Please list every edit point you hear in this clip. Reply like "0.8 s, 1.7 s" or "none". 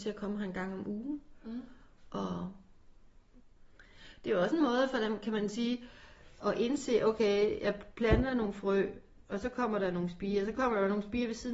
6.4 s